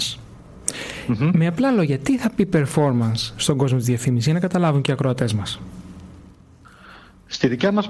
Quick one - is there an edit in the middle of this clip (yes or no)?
no